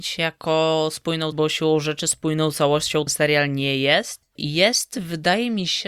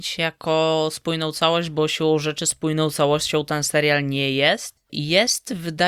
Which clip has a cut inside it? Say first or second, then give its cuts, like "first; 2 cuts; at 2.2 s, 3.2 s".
first; 2 cuts; at 1.3 s, 3.1 s